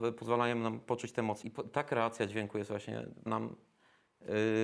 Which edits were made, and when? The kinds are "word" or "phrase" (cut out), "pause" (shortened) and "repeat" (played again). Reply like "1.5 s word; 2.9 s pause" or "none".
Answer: 1.4 s word; 3.3 s word